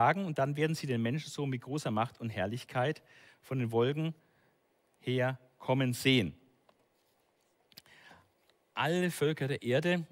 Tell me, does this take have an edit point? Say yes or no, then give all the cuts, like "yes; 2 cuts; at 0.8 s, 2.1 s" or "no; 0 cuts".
no; 0 cuts